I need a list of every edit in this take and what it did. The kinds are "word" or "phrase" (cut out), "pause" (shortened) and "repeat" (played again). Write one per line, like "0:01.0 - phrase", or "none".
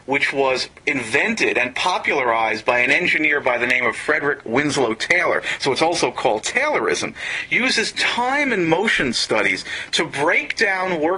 none